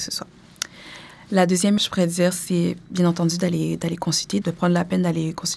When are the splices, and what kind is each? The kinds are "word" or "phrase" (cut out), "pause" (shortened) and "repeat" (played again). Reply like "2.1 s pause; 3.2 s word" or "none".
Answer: 1.8 s word; 4.4 s word